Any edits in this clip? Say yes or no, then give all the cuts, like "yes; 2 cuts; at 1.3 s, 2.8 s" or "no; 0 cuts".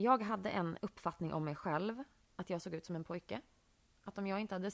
no; 0 cuts